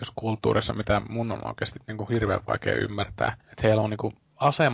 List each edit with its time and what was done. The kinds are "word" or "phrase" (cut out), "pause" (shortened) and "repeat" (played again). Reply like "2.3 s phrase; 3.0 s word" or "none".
3.4 s pause